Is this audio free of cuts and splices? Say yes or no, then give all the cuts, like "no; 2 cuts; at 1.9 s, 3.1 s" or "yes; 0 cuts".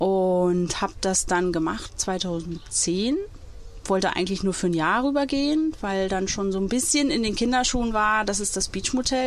yes; 0 cuts